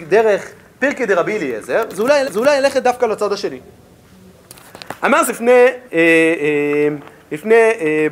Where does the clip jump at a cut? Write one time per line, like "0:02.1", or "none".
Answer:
0:02.2
0:05.3
0:05.9